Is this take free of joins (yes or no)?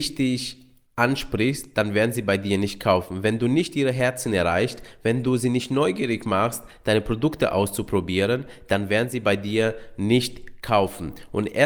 yes